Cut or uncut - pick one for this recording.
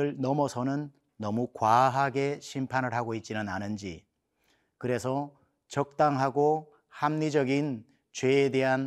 uncut